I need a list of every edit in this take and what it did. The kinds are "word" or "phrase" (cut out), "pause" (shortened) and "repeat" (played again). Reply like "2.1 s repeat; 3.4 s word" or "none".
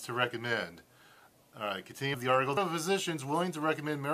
2.1 s word; 2.6 s word

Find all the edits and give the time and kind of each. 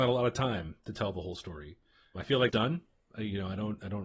2.2 s word; 2.5 s word

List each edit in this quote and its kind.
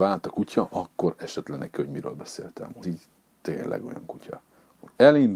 2.8 s word

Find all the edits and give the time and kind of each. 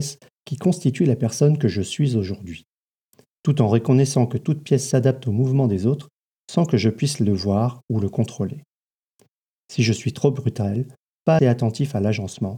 11.4 s word

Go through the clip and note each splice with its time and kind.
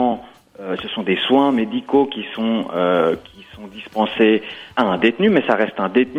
4.7 s pause

